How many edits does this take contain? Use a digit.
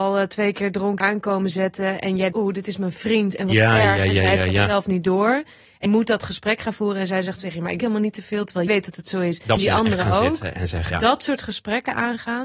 8